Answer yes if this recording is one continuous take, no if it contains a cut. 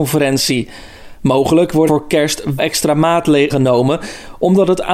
no